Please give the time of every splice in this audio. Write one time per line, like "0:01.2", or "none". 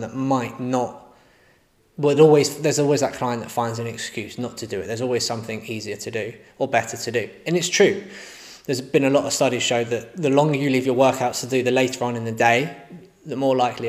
none